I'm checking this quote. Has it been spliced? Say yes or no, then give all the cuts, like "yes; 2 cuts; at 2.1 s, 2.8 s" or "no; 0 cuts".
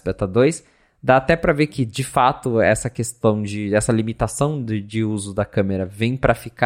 no; 0 cuts